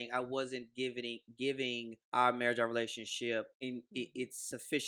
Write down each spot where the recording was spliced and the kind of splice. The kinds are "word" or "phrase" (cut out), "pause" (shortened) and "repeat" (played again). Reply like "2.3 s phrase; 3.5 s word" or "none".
2.0 s pause; 3.5 s pause